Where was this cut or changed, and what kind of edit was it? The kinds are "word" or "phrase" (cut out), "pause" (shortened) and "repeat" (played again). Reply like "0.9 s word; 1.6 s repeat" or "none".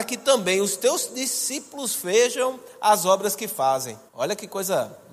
4.1 s pause